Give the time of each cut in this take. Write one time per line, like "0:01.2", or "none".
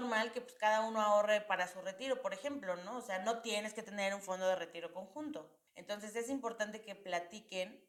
0:05.7